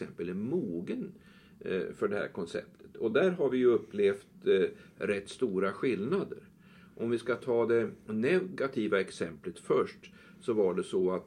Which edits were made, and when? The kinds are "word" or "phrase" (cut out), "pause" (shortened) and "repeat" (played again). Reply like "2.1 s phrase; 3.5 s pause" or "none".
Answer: none